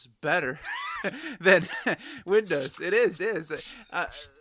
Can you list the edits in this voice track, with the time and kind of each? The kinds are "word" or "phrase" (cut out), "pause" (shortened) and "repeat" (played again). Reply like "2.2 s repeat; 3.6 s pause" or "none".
3.2 s word